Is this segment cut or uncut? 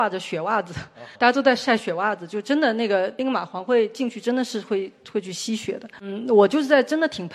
cut